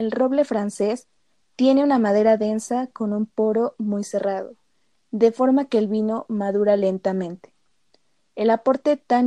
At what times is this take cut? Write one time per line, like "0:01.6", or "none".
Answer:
none